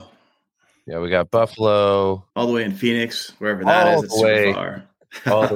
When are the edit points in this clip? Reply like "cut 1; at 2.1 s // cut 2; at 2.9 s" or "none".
cut 1; at 2.3 s